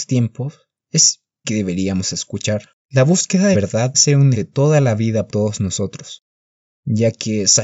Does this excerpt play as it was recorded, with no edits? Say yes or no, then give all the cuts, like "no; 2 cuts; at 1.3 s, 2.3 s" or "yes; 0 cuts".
no; 6 cuts; at 1.4 s, 2.8 s, 3.5 s, 3.9 s, 4.3 s, 5.3 s